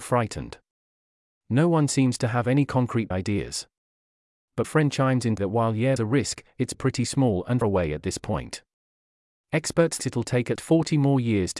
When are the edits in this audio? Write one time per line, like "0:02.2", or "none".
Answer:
0:03.1
0:04.6
0:05.4
0:06.0
0:06.7
0:07.6
0:10.0
0:10.6